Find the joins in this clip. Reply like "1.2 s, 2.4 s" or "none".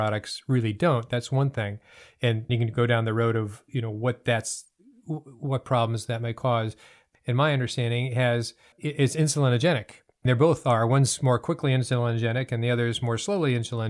2.5 s, 7.1 s, 8.7 s, 10.3 s